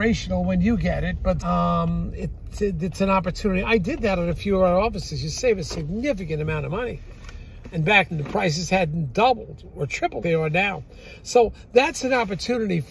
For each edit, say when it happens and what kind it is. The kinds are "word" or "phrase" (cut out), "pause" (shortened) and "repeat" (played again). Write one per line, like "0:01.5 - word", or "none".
0:01.4 - word
0:08.1 - word
0:10.2 - word